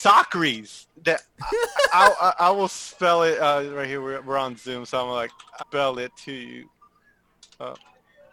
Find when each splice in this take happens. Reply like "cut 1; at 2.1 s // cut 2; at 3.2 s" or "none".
cut 1; at 1.0 s // cut 2; at 5.6 s